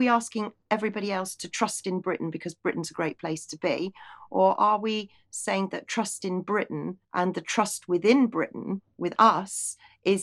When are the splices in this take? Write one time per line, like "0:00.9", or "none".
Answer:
0:07.0